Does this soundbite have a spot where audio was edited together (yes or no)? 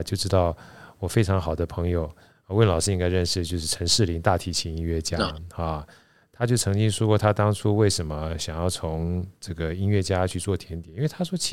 no